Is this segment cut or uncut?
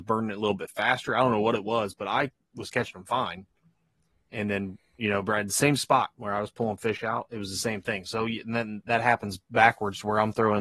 uncut